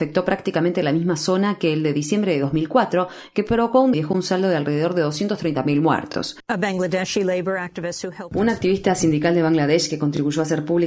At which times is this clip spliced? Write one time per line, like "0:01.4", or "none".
0:03.9